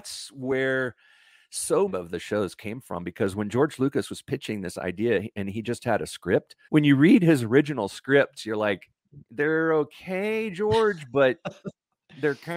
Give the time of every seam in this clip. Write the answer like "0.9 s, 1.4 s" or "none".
1.9 s, 6.6 s, 9.2 s